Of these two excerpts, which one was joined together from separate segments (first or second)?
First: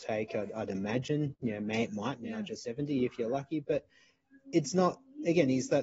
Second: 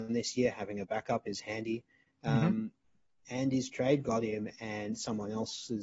second